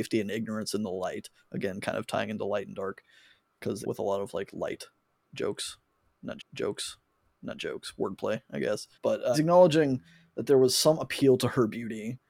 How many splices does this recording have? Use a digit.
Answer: 4